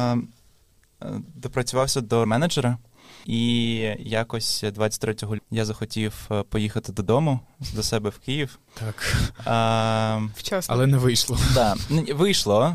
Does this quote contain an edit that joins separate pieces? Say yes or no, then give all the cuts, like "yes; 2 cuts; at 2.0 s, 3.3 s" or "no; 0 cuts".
yes; 3 cuts; at 2.3 s, 5.4 s, 8.7 s